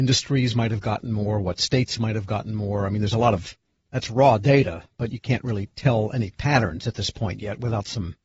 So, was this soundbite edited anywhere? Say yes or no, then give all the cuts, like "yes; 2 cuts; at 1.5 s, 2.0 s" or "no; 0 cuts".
no; 0 cuts